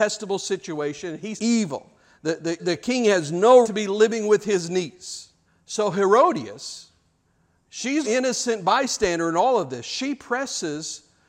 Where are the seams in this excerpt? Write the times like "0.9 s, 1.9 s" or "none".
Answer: 1.4 s, 2.6 s, 3.6 s, 5.5 s, 8.0 s